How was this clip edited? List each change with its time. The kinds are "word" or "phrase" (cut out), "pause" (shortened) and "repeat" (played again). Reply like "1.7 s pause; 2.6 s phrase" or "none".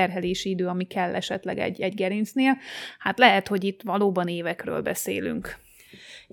none